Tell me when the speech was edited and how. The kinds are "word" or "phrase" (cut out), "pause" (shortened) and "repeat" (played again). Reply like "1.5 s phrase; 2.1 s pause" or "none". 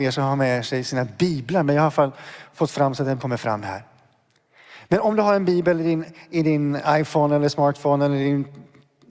3.2 s phrase